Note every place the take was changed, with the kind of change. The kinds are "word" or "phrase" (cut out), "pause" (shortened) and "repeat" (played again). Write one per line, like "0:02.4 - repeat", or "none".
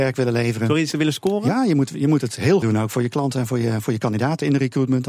0:00.9 - word
0:02.6 - phrase